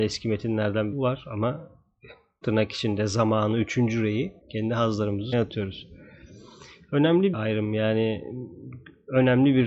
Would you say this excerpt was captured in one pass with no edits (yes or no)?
no